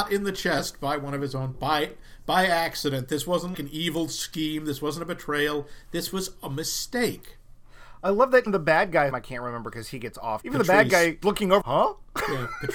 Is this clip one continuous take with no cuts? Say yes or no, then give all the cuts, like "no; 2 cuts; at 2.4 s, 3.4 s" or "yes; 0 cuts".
no; 7 cuts; at 1.5 s, 3.5 s, 8.5 s, 9.1 s, 10.4 s, 11.2 s, 11.6 s